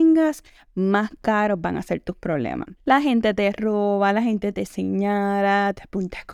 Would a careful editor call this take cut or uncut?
cut